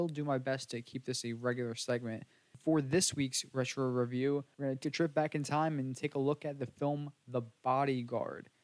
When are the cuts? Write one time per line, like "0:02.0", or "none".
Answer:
0:04.8